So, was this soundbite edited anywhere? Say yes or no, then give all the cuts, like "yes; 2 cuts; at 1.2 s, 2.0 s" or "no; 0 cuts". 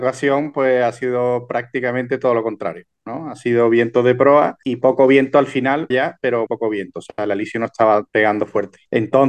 yes; 2 cuts; at 5.9 s, 6.5 s